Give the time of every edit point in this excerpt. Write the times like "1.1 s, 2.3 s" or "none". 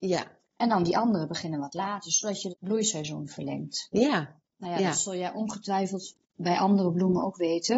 2.5 s